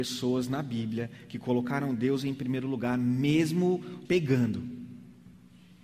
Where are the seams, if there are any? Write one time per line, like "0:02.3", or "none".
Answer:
0:04.1